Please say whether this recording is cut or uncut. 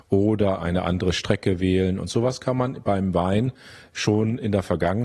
uncut